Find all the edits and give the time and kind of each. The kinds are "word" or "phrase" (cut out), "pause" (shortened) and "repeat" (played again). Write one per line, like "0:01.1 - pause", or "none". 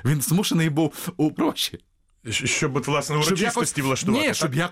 0:01.4 - phrase